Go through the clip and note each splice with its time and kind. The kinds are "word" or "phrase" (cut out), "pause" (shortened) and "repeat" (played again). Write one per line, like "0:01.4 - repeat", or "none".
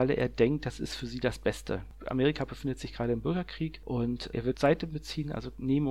0:04.5 - word